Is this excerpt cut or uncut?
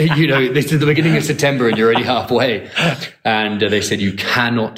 uncut